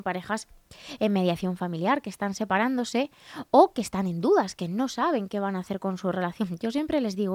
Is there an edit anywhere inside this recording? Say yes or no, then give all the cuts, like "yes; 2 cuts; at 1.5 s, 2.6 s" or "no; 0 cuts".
no; 0 cuts